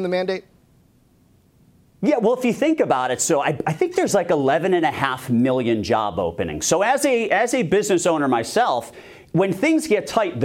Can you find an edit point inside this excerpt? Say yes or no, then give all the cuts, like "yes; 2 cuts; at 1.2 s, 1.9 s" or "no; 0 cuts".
no; 0 cuts